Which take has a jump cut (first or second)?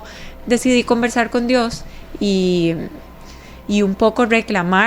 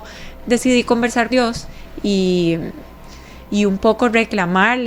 second